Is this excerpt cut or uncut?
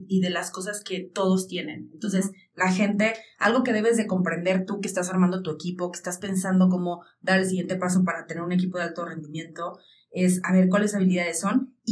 uncut